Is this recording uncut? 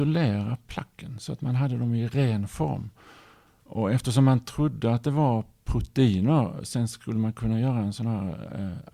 yes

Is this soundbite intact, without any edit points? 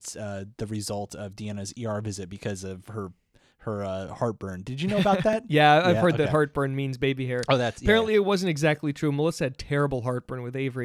yes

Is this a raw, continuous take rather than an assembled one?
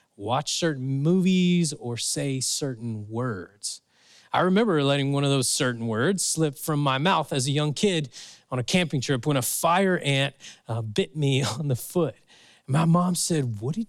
yes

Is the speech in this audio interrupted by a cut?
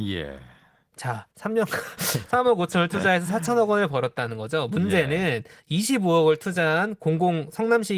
yes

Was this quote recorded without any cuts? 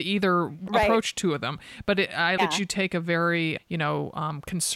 no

